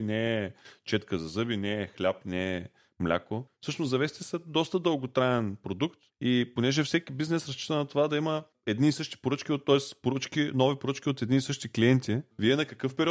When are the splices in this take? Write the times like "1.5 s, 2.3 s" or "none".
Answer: none